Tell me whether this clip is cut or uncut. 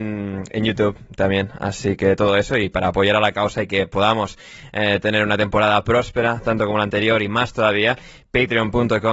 uncut